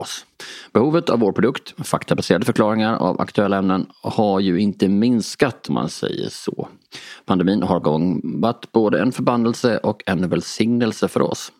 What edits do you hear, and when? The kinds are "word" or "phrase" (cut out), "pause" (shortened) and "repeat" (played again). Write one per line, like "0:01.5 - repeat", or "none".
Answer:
0:05.7 - word
0:07.8 - phrase